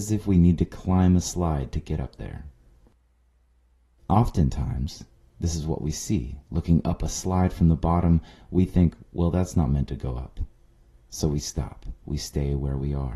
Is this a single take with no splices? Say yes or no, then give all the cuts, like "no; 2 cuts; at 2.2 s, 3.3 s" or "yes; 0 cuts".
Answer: no; 2 cuts; at 6.5 s, 12.0 s